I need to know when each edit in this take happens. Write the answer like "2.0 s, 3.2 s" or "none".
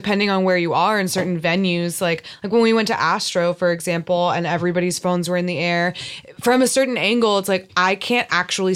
none